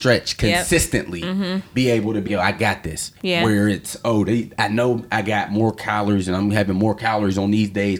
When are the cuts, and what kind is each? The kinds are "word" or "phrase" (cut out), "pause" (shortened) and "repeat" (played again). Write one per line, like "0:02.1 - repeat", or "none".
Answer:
0:02.3 - word
0:03.2 - pause